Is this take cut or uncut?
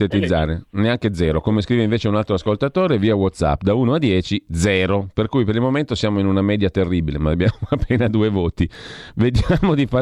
uncut